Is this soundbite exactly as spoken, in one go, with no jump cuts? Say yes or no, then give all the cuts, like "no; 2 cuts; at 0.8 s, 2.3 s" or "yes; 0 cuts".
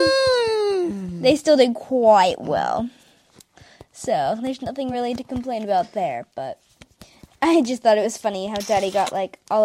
yes; 0 cuts